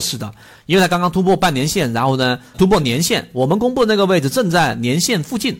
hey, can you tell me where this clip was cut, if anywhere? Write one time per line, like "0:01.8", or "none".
0:02.5